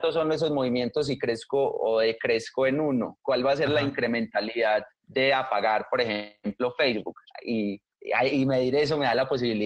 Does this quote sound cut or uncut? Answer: cut